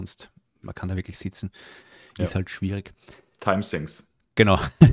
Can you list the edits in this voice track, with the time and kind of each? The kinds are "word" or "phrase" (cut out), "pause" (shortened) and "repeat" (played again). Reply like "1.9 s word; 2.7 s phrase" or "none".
none